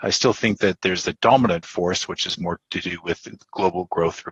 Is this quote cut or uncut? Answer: uncut